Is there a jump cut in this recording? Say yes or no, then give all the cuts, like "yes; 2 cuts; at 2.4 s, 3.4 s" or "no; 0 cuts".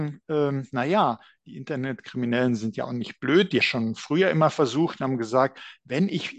yes; 1 cut; at 3.6 s